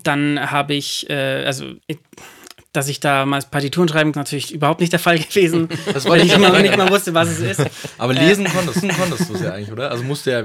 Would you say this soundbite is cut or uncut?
cut